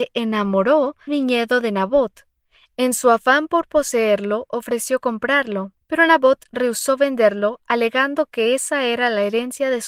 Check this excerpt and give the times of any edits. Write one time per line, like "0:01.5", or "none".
0:01.1
0:05.8